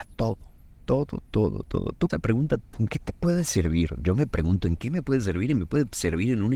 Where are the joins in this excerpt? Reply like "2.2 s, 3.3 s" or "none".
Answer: 2.1 s, 2.6 s